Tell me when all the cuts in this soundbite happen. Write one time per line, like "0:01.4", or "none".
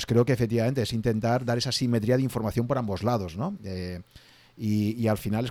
none